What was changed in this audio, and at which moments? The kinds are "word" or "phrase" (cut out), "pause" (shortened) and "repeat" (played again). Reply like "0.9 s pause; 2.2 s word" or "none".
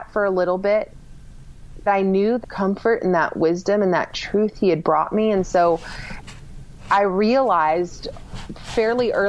1.9 s word; 2.4 s word